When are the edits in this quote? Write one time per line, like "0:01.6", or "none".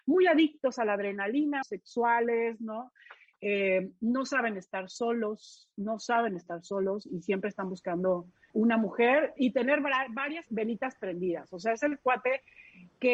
0:01.6
0:08.5
0:09.4
0:10.5

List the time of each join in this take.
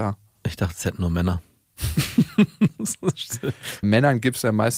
0:03.8

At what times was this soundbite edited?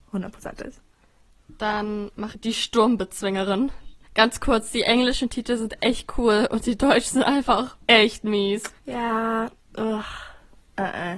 0:02.3
0:04.0
0:07.8
0:08.8

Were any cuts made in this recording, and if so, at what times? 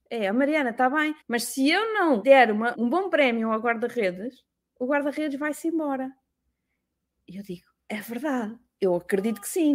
0:01.2
0:02.2
0:02.7

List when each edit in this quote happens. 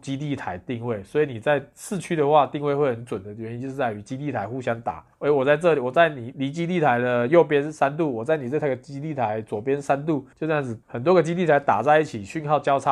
0:05.1
0:10.3
0:10.8

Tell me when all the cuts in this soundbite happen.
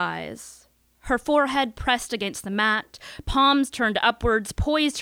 none

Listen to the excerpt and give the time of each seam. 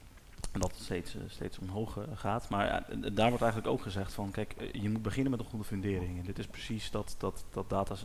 none

